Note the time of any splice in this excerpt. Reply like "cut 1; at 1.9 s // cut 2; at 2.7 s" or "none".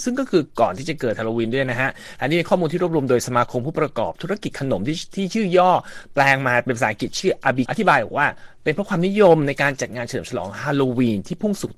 cut 1; at 7.6 s

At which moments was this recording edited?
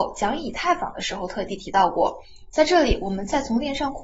none

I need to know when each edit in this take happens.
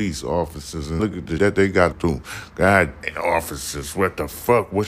cut 1; at 1.0 s // cut 2; at 1.4 s // cut 3; at 1.9 s // cut 4; at 3.0 s

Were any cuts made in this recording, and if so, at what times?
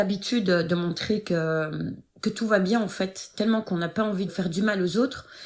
cut 1; at 2.1 s // cut 2; at 4.3 s

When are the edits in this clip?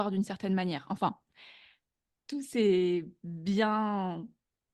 none

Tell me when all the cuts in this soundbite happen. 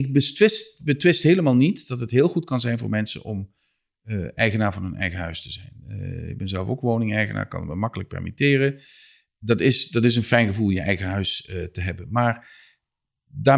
none

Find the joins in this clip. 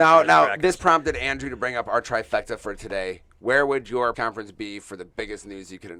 cut 1; at 4.1 s

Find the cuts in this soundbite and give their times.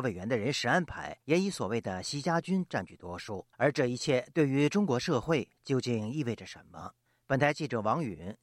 cut 1; at 1.2 s // cut 2; at 3.5 s // cut 3; at 7.1 s

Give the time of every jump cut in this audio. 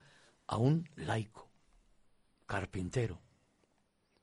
none

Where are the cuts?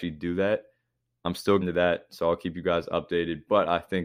cut 1; at 1.6 s

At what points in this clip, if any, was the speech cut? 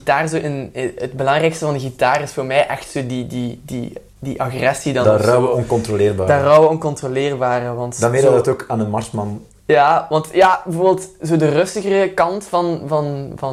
cut 1; at 4.1 s // cut 2; at 9.6 s

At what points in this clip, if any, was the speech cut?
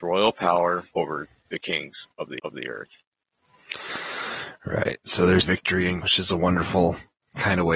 cut 1; at 0.9 s // cut 2; at 2.4 s // cut 3; at 5.4 s // cut 4; at 6.0 s

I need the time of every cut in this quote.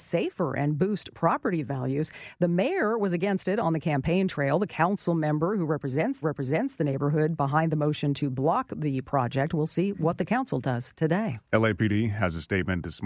cut 1; at 6.2 s // cut 2; at 11.4 s

